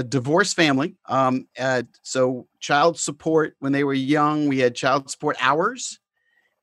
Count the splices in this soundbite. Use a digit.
1